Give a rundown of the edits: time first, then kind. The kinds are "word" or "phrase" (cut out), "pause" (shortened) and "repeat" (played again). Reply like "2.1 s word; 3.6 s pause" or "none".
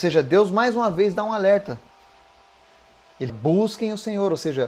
3.3 s word